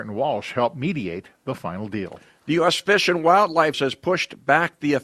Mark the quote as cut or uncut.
cut